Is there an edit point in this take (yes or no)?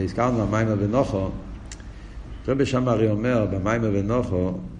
no